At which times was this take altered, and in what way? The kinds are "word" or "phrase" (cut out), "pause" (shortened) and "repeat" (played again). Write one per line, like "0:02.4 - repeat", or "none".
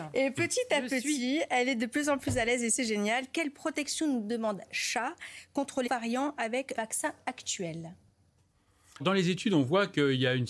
0:05.9 - word
0:06.7 - word
0:09.0 - word